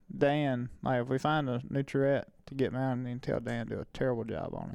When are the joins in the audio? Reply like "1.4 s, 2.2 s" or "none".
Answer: none

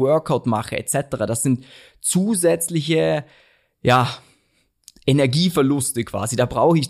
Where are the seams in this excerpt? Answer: none

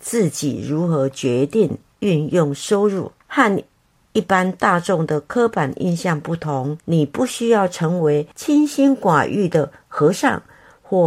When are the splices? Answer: 3.2 s, 6.8 s, 8.3 s

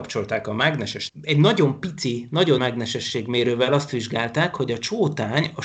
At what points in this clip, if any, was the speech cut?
1.1 s, 2.6 s

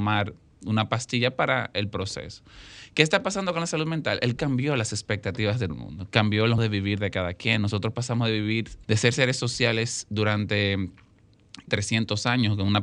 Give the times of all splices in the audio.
4.4 s, 5.7 s, 6.6 s, 8.8 s, 11.7 s

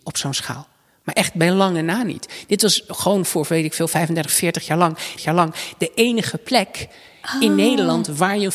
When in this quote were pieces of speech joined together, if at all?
3.2 s, 5.2 s

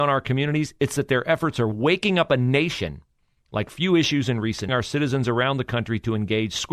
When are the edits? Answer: 4.7 s

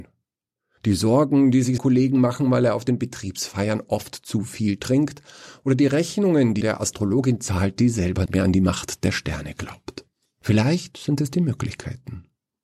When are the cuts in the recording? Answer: 1.8 s, 6.6 s, 8.3 s, 10.3 s

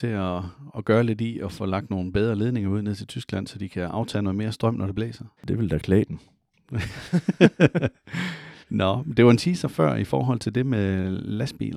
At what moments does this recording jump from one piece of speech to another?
5.4 s, 8.6 s

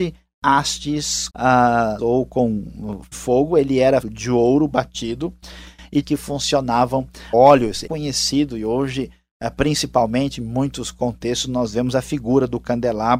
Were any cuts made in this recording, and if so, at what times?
1.3 s, 2.0 s, 3.1 s, 4.0 s, 6.0 s, 7.3 s, 7.9 s

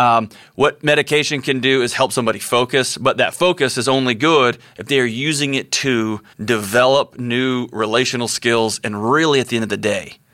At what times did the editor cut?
6.3 s

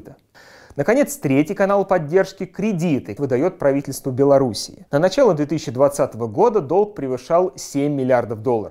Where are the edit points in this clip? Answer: 3.2 s, 4.9 s

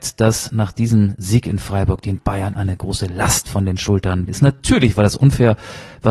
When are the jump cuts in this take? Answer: 4.3 s

